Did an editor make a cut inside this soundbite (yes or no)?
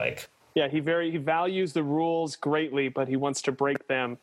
no